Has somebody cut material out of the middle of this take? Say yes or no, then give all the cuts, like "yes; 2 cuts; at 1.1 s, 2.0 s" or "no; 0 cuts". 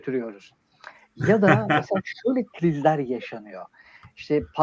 no; 0 cuts